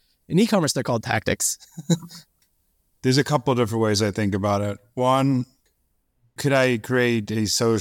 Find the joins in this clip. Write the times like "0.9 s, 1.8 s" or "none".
none